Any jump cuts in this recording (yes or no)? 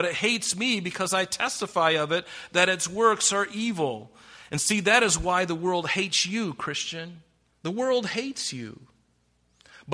yes